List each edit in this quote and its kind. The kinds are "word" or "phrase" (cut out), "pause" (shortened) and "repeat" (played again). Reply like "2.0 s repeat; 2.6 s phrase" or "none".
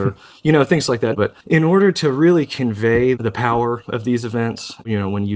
1.4 s pause